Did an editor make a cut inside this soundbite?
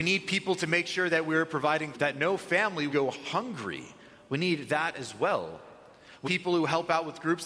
yes; 3 cuts; at 1.9 s, 2.9 s, 6.2 s

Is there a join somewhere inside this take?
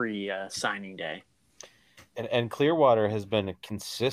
no; 0 cuts

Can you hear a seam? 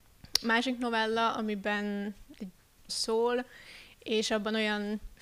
yes; 1 cut; at 2.9 s

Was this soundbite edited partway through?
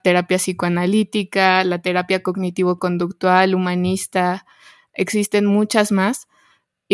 no; 0 cuts

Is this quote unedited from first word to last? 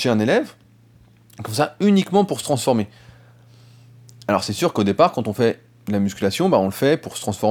yes; 0 cuts

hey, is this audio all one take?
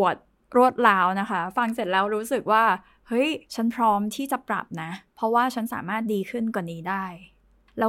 no; 1 cut; at 3.4 s

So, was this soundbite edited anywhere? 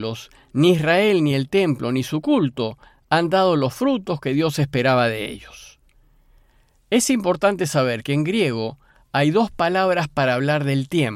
no; 0 cuts

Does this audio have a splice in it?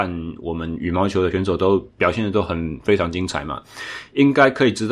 yes; 1 cut; at 1.9 s

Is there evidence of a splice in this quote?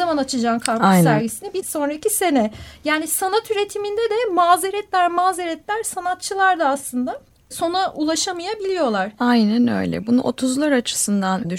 no; 0 cuts

